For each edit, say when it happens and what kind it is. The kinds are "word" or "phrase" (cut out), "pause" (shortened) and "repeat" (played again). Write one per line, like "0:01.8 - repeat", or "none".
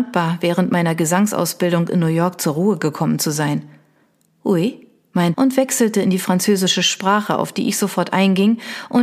0:05.3 - word